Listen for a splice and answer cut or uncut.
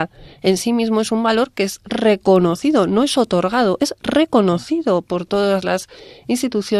uncut